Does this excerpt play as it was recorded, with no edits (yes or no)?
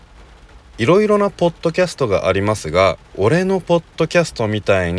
no